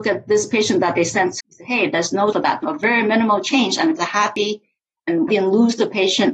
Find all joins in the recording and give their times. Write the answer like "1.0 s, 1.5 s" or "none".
1.4 s, 2.3 s, 2.6 s, 4.0 s, 5.3 s